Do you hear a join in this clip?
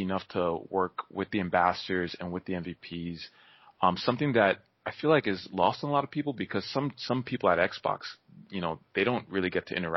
no; 0 cuts

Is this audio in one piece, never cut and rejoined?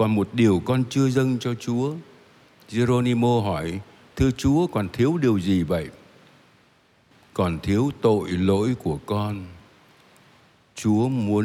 yes; 0 cuts

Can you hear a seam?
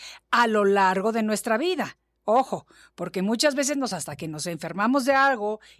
yes; 1 cut; at 3.9 s

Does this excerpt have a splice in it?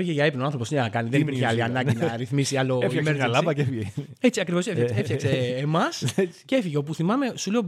no; 0 cuts

